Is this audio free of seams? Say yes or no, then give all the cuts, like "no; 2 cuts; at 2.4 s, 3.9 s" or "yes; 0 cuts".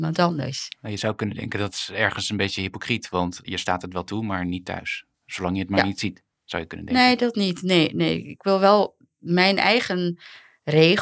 no; 2 cuts; at 3.4 s, 5.1 s